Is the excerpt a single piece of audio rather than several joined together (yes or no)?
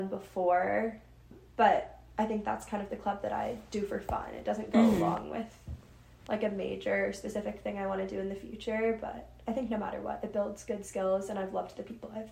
yes